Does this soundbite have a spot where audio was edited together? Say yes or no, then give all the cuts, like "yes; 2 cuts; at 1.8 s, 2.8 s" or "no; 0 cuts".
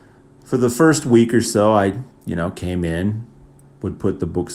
no; 0 cuts